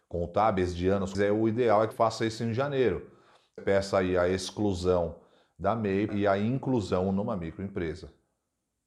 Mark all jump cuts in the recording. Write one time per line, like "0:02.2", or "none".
0:01.1
0:01.9
0:03.6
0:06.1